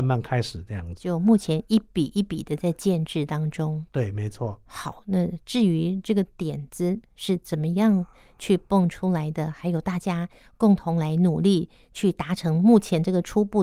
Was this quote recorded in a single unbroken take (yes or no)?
yes